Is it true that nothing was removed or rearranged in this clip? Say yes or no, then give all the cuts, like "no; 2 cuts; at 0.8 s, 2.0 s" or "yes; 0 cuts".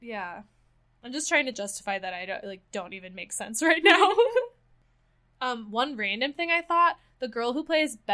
yes; 0 cuts